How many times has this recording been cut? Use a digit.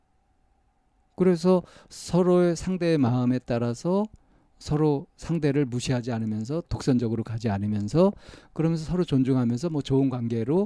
1